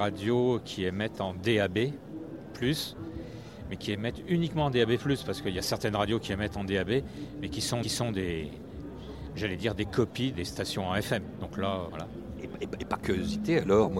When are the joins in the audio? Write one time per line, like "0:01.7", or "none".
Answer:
0:07.8
0:10.3
0:11.9